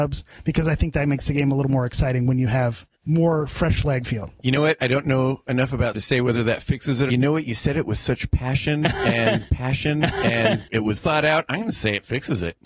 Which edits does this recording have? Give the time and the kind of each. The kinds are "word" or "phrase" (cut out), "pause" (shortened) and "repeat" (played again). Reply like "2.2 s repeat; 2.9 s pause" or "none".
2.9 s pause; 4.0 s phrase; 5.9 s word; 7.1 s phrase; 9.5 s repeat; 11.0 s word